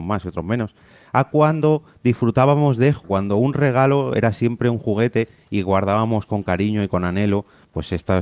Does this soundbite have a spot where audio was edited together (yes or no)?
yes